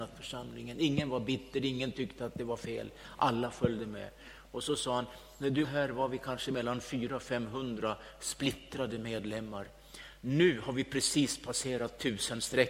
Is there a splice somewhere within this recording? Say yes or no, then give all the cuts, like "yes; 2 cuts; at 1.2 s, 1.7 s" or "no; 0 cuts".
yes; 1 cut; at 5.6 s